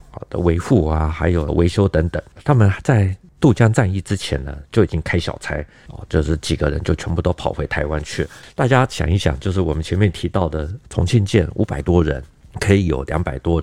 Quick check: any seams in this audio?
no; 0 cuts

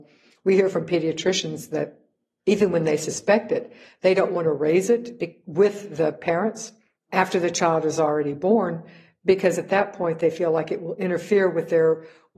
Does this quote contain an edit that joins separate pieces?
no; 0 cuts

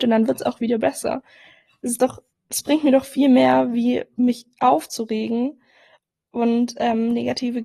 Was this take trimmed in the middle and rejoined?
yes; 1 cut; at 2.3 s

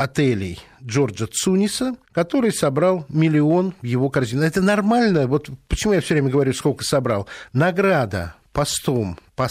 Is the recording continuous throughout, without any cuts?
no; 1 cut; at 2.0 s

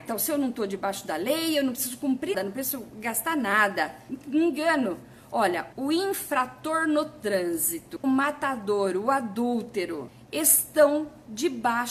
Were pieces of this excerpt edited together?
yes; 3 cuts; at 2.3 s, 5.7 s, 8.0 s

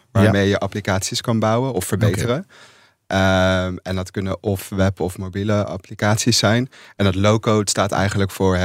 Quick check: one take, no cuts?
yes; 0 cuts

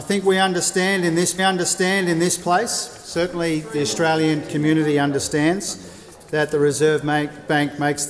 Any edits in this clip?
yes; 1 cut; at 1.4 s

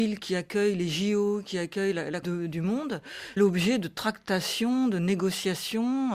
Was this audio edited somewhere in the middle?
yes; 2 cuts; at 2.2 s, 3.4 s

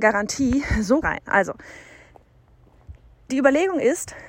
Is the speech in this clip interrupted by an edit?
yes; 1 cut; at 1.0 s

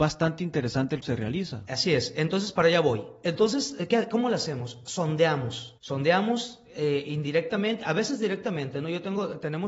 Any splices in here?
yes; 2 cuts; at 1.0 s, 5.8 s

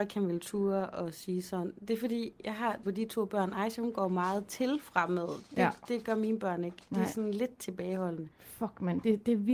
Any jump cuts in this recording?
yes; 2 cuts; at 2.8 s, 8.3 s

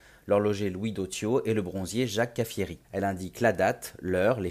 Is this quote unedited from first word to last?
no; 1 cut; at 2.8 s

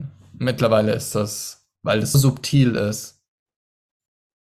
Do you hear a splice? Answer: yes; 2 cuts; at 1.8 s, 2.1 s

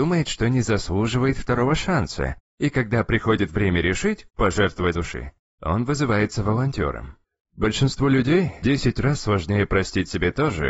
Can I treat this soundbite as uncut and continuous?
no; 4 cuts; at 4.3 s, 4.9 s, 7.2 s, 8.6 s

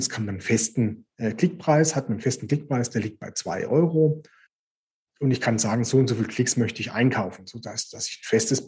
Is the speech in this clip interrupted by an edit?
no; 0 cuts

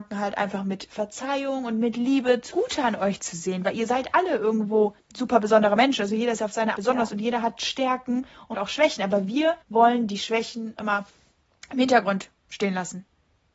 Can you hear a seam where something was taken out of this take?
yes; 6 cuts; at 2.5 s, 5.0 s, 6.7 s, 8.5 s, 9.6 s, 10.8 s

